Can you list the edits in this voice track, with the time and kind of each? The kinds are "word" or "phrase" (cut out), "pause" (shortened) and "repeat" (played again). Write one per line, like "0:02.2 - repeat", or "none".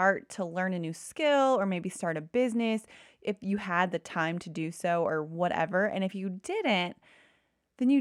none